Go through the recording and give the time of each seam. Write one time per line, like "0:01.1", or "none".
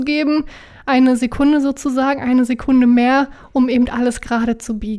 none